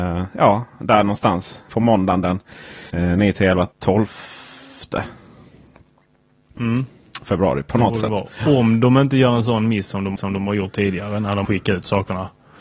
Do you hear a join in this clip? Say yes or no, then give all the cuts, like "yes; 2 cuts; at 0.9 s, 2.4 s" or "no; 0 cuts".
yes; 5 cuts; at 1.7 s, 2.9 s, 3.7 s, 10.2 s, 11.4 s